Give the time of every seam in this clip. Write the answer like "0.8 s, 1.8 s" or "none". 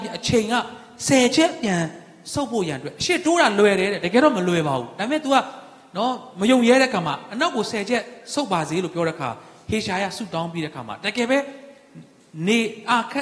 none